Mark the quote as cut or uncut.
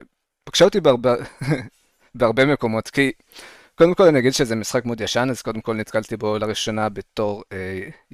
uncut